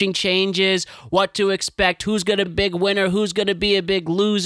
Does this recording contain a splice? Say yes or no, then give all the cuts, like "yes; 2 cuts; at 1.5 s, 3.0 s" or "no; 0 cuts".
yes; 1 cut; at 2.5 s